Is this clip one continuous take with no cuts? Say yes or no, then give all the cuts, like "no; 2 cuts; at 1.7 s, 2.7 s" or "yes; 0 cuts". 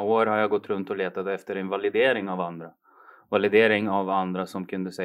yes; 0 cuts